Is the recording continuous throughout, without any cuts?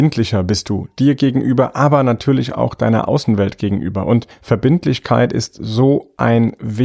yes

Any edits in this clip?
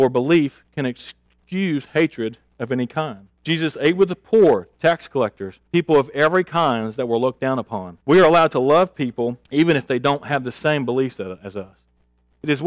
yes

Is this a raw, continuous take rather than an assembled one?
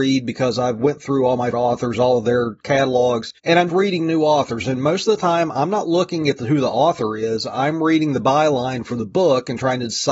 no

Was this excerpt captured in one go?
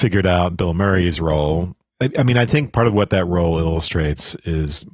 yes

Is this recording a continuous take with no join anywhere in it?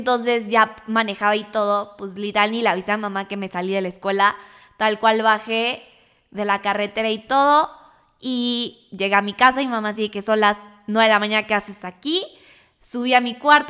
yes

